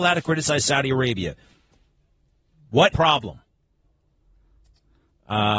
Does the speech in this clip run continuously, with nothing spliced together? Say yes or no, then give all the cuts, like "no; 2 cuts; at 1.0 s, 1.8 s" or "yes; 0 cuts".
no; 1 cut; at 2.9 s